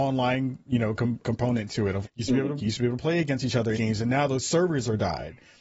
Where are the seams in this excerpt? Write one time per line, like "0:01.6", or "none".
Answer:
0:01.2
0:02.0
0:02.6
0:03.7